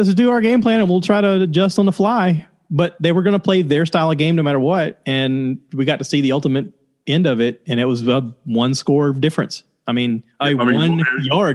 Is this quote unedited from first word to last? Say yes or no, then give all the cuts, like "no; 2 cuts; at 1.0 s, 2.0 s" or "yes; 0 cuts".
yes; 0 cuts